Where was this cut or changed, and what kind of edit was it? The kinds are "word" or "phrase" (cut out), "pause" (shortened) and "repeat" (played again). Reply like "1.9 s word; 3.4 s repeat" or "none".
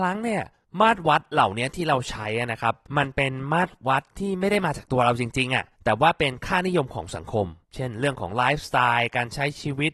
2.8 s pause; 5.7 s pause; 7.6 s pause